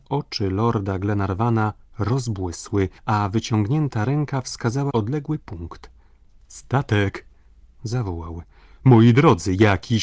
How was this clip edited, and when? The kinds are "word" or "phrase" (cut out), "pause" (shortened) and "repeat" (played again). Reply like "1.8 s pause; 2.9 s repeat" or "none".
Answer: 3.0 s pause; 4.9 s word